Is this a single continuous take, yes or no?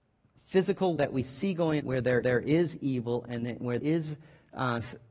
no